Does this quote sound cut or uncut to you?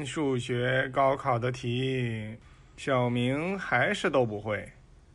uncut